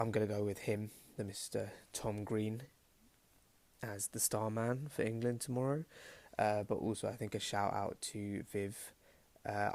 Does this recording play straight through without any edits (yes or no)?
yes